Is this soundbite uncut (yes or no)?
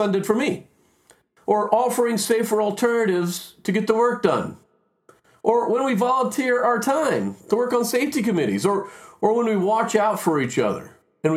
yes